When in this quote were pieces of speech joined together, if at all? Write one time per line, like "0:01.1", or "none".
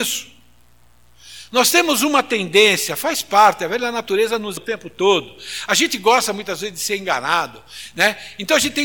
0:04.6